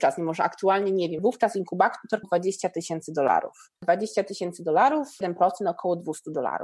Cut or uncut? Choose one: cut